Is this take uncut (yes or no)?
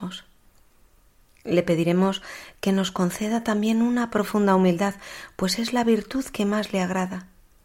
yes